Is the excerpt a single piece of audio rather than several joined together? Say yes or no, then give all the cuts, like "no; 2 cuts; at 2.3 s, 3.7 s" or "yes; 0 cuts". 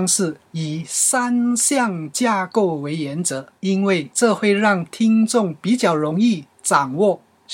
no; 2 cuts; at 3.6 s, 4.1 s